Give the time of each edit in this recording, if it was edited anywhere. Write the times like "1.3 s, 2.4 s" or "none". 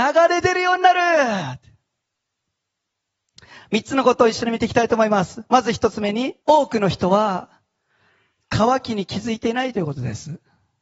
6.4 s